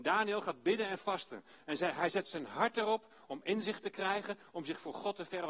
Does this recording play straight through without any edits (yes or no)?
yes